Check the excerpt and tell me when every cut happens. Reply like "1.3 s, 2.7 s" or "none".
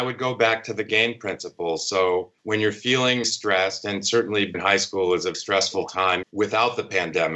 2.4 s, 3.2 s, 4.5 s, 5.3 s, 6.2 s